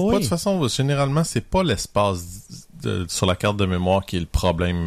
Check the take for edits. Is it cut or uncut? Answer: uncut